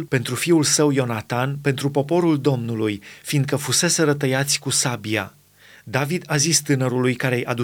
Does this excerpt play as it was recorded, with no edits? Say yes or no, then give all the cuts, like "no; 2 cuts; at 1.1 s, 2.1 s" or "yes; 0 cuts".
no; 1 cut; at 5.4 s